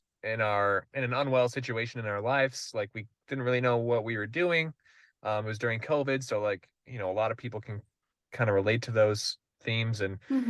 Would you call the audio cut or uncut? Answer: uncut